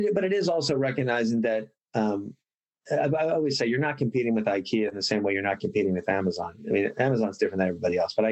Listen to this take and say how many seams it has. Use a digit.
0